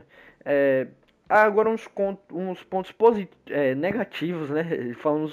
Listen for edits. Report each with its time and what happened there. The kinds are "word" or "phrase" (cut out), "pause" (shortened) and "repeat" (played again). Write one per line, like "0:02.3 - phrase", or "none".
none

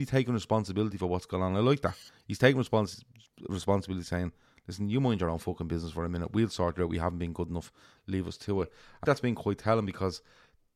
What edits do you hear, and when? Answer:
0:09.0 - phrase

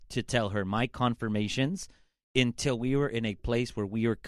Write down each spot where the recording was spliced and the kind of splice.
none

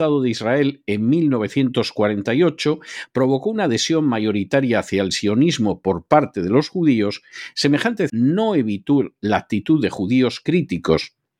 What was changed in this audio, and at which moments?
0:08.1 - word

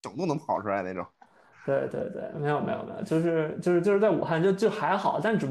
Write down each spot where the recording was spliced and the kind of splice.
none

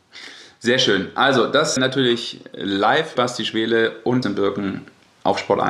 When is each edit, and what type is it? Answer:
0:01.8 - word
0:03.2 - word
0:04.2 - phrase

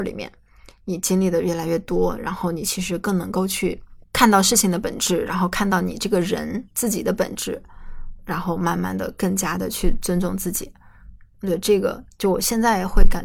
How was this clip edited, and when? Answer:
0:04.0 - pause
0:06.7 - pause
0:08.2 - word
0:11.3 - word
0:12.1 - pause

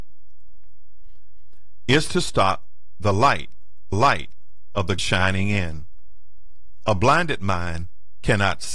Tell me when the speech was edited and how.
0:03.9 - repeat
0:05.0 - phrase

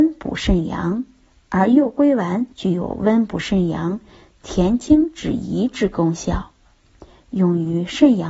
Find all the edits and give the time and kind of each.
0:02.5 - pause

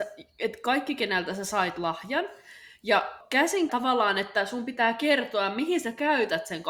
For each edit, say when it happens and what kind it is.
0:03.7 - phrase

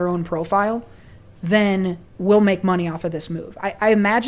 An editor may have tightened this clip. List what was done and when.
0:02.1 - pause

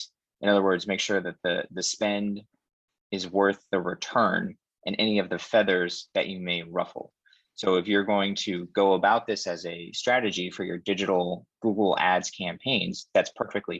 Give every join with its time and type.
none

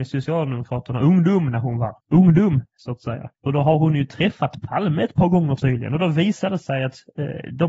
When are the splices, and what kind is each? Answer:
0:02.0 - pause
0:03.4 - pause

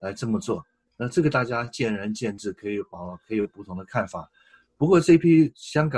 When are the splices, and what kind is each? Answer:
none

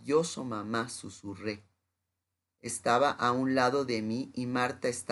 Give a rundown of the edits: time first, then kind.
none

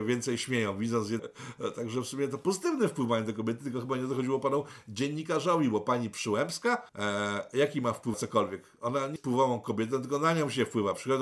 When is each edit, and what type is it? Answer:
0:01.2 - word
0:06.9 - pause
0:08.1 - word
0:09.2 - word

